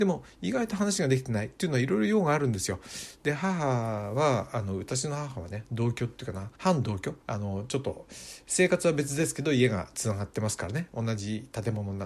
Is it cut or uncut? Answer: cut